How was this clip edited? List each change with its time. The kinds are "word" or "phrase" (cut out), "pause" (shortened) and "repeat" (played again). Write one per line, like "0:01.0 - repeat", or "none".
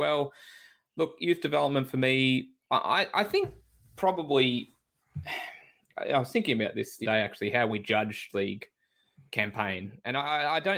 0:07.0 - word
0:08.3 - phrase